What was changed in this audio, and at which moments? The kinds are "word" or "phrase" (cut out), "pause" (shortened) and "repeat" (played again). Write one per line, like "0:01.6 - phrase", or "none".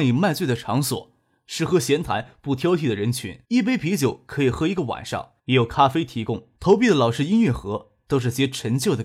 0:03.4 - pause
0:05.4 - pause
0:06.6 - pause